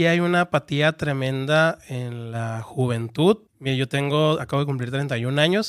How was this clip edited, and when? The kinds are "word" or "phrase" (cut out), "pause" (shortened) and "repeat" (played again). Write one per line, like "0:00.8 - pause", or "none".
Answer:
0:03.5 - pause